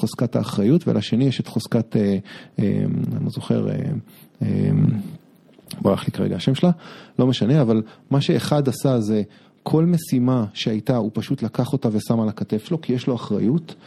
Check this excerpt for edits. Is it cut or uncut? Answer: uncut